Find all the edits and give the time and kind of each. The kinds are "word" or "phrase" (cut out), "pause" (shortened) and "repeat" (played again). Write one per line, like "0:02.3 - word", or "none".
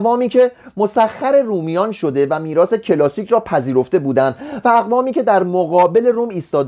none